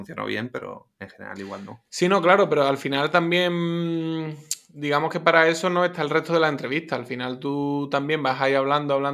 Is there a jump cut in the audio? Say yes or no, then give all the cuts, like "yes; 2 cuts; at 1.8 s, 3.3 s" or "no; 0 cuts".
yes; 1 cut; at 1.9 s